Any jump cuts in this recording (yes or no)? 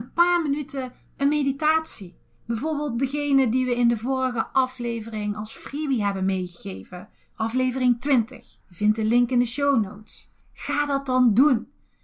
yes